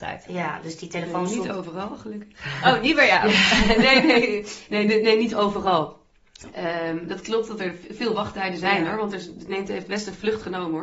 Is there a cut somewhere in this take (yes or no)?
no